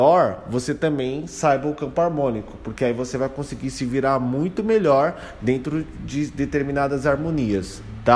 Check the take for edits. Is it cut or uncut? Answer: uncut